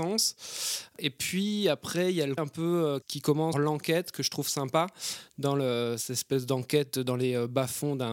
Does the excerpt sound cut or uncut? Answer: cut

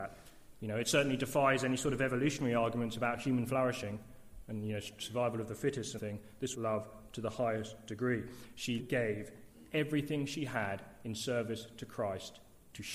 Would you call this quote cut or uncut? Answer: cut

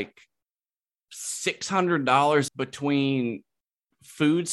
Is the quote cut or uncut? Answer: cut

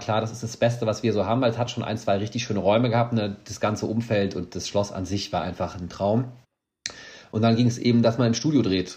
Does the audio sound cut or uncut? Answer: uncut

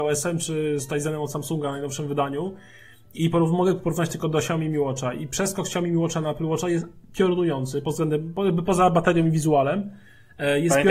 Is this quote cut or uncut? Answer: uncut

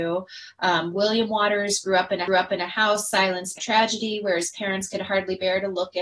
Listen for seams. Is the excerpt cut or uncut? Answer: cut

